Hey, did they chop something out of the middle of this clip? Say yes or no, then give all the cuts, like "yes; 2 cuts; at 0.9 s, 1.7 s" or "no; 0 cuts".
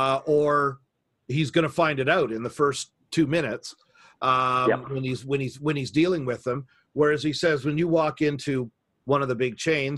no; 0 cuts